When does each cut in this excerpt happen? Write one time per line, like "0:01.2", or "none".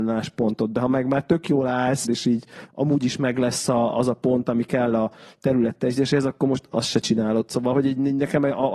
0:02.0